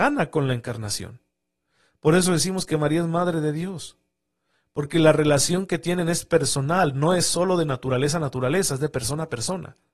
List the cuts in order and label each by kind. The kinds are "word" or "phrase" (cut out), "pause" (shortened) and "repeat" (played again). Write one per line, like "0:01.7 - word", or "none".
none